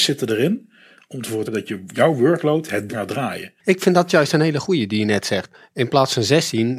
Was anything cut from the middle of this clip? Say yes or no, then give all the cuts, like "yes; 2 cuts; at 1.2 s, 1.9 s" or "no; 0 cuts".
yes; 3 cuts; at 1.5 s, 2.9 s, 3.6 s